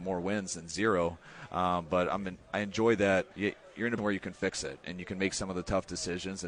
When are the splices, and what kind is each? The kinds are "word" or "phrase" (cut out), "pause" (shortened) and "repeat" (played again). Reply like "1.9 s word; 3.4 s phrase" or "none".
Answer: 2.4 s pause; 3.3 s pause; 4.0 s word

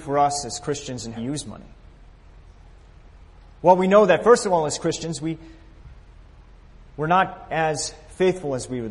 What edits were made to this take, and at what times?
1.2 s phrase; 6.9 s pause

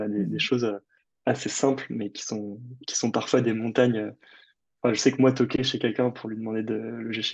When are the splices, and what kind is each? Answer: none

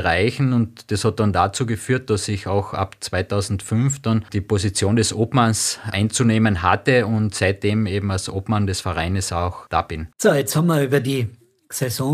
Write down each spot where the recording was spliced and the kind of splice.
10.1 s pause

